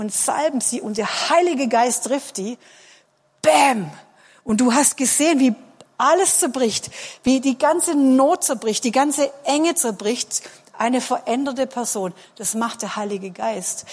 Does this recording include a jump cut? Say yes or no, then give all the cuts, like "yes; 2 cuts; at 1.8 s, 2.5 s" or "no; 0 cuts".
no; 0 cuts